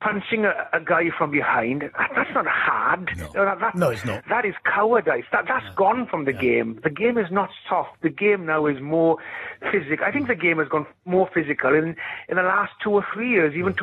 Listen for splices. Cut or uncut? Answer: uncut